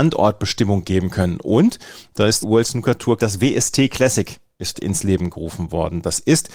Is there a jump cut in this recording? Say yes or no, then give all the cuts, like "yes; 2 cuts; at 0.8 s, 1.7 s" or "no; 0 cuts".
yes; 3 cuts; at 2.4 s, 3.2 s, 4.7 s